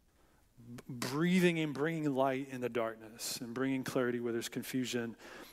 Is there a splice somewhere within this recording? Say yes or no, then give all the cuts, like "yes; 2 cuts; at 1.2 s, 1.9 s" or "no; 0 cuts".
no; 0 cuts